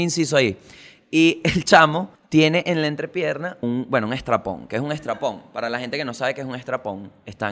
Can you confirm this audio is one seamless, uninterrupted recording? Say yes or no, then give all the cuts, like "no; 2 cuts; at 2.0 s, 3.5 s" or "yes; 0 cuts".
no; 2 cuts; at 2.1 s, 3.6 s